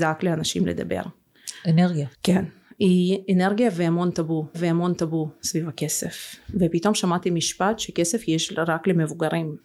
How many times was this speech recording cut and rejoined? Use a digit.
2